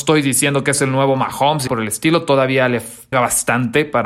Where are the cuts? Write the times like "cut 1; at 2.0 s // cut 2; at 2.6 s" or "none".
cut 1; at 1.7 s // cut 2; at 3.1 s